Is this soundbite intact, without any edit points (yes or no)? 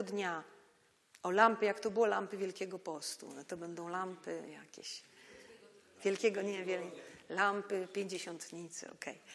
yes